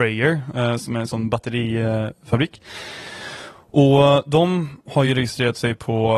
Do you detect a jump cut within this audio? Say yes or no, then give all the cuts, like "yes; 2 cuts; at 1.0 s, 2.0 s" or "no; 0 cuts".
no; 0 cuts